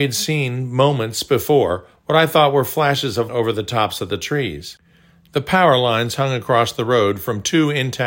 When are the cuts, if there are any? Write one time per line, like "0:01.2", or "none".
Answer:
0:03.3